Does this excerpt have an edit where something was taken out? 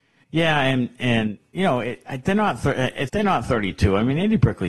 yes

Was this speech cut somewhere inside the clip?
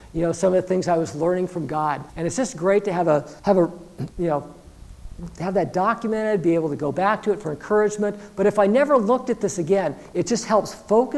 yes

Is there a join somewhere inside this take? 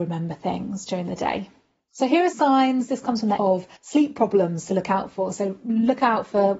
yes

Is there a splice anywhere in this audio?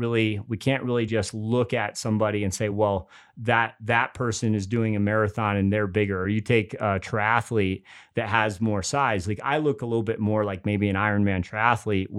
no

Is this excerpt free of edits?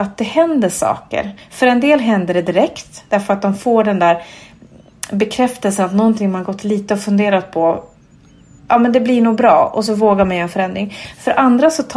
yes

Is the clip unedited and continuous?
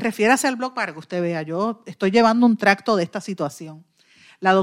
yes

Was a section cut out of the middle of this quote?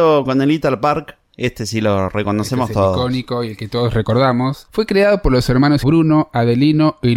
yes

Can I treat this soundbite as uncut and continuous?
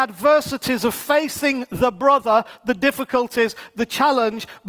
yes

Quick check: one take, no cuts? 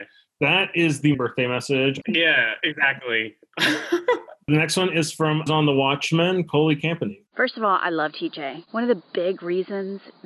no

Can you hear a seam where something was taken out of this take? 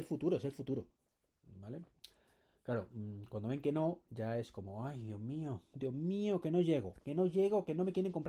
no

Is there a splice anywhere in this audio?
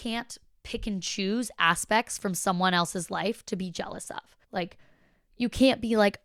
yes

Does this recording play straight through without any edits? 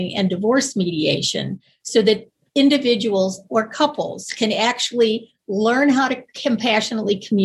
yes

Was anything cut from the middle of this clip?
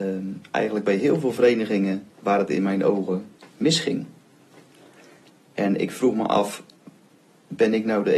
yes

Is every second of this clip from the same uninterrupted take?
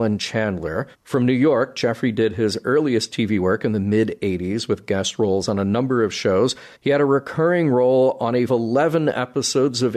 no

